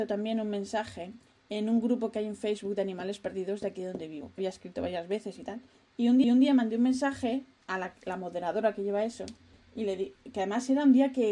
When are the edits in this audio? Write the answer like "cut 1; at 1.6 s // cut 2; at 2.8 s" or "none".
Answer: cut 1; at 4.4 s // cut 2; at 6.2 s // cut 3; at 7.6 s